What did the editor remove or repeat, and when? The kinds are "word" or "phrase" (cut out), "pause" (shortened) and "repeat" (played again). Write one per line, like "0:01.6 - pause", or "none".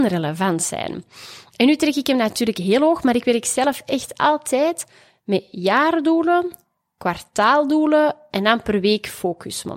none